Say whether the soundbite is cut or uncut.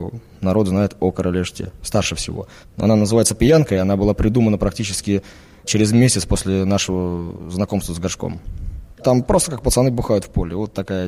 uncut